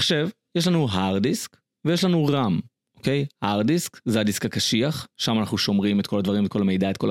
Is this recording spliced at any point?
no; 0 cuts

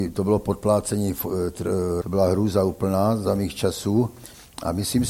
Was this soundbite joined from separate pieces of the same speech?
yes; 1 cut; at 2.0 s

